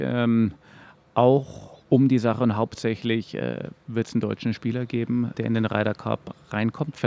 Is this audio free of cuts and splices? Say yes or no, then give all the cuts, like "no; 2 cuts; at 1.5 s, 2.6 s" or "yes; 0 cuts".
no; 2 cuts; at 1.8 s, 5.3 s